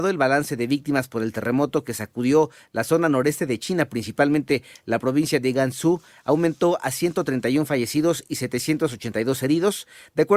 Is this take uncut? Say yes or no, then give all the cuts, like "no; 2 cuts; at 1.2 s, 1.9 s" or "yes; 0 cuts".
yes; 0 cuts